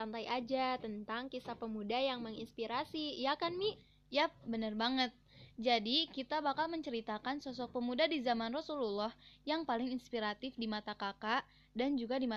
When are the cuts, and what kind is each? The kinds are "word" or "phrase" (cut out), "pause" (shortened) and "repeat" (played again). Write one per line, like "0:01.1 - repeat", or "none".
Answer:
none